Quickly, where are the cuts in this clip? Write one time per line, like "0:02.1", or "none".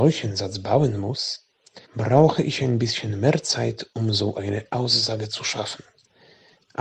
0:01.8